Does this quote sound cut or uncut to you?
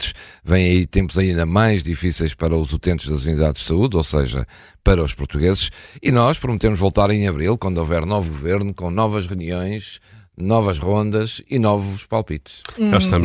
uncut